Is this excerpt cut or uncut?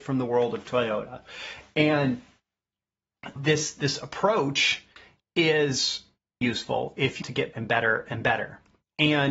cut